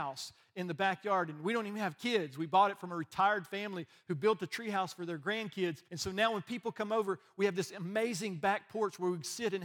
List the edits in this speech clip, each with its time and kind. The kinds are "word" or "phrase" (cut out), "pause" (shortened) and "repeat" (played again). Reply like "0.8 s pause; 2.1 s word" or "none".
5.8 s pause